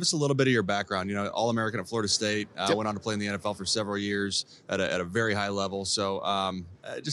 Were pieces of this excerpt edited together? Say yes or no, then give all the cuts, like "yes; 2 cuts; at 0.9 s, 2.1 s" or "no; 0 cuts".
no; 0 cuts